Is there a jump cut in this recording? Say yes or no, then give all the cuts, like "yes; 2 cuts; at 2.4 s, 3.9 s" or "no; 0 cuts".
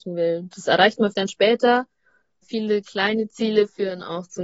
yes; 2 cuts; at 1.1 s, 2.4 s